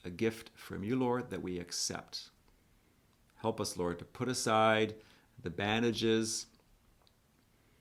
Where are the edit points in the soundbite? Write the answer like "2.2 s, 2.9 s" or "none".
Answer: none